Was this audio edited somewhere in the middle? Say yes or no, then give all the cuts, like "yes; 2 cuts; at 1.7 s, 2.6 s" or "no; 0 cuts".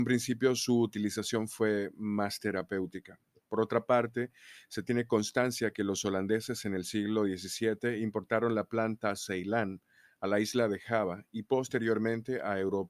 no; 0 cuts